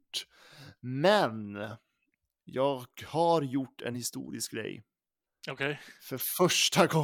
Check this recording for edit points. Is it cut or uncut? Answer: uncut